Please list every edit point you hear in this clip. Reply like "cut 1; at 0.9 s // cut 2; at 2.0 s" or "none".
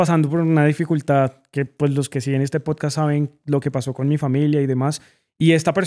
none